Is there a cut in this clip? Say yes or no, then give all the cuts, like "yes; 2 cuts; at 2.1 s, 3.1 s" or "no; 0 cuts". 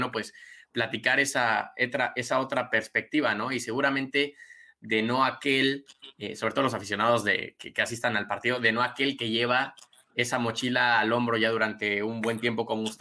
no; 0 cuts